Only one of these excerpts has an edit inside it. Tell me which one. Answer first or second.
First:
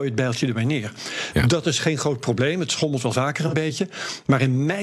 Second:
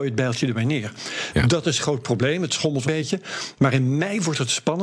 second